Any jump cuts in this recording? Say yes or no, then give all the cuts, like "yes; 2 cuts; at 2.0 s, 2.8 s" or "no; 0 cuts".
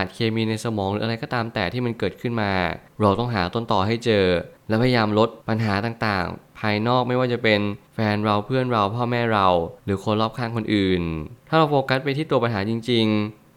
yes; 6 cuts; at 2.9 s, 4.6 s, 5.4 s, 7.9 s, 9.8 s, 11.4 s